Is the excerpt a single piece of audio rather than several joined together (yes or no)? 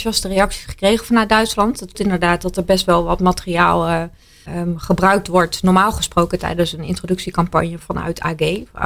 no